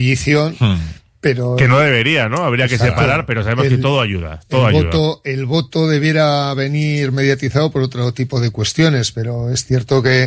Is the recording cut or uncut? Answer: uncut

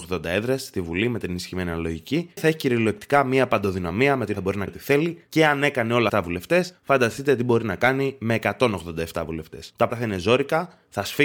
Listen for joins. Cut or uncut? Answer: cut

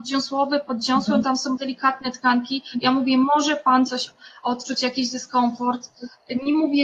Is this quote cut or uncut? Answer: cut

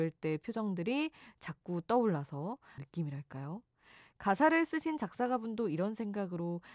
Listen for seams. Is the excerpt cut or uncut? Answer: cut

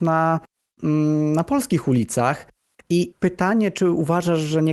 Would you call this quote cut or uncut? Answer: cut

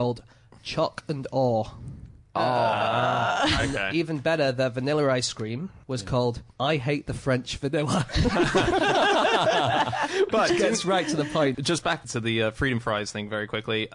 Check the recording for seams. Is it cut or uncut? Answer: cut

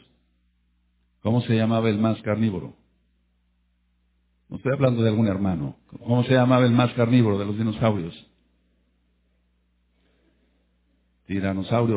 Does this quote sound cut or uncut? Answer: uncut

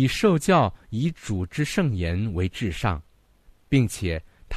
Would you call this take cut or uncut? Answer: uncut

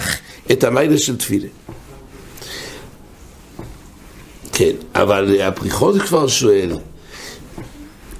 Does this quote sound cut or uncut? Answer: uncut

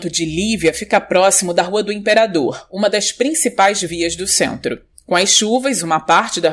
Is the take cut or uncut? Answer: uncut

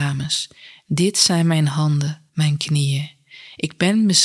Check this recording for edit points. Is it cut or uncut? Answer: cut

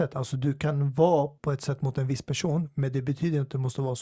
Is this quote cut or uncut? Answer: cut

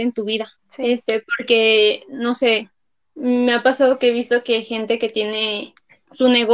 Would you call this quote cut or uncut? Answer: uncut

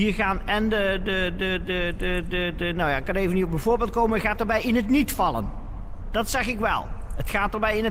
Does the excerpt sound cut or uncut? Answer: uncut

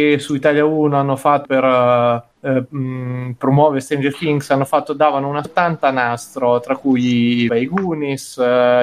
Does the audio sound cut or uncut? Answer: cut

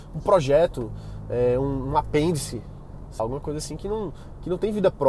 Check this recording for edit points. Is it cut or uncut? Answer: cut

